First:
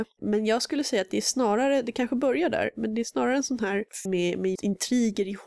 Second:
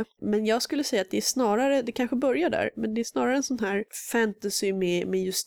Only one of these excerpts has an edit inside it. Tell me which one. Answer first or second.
first